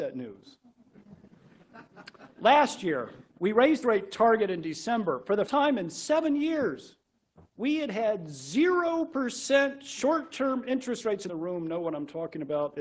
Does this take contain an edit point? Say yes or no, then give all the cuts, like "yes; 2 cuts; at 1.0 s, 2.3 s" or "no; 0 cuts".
yes; 6 cuts; at 1.3 s, 3.3 s, 3.8 s, 5.5 s, 7.5 s, 11.3 s